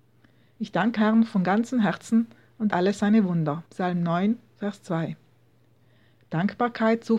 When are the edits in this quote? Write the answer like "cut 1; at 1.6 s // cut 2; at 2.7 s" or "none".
cut 1; at 1.0 s // cut 2; at 2.7 s // cut 3; at 3.7 s